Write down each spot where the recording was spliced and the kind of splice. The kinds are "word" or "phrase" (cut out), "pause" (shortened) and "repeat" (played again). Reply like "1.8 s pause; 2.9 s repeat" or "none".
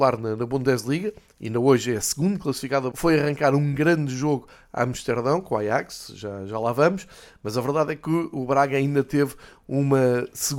2.9 s phrase